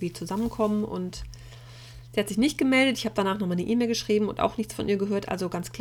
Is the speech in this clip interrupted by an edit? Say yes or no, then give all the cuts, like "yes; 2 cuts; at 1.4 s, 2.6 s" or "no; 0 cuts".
no; 0 cuts